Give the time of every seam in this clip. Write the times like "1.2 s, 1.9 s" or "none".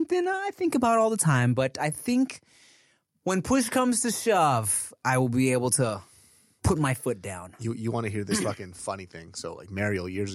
none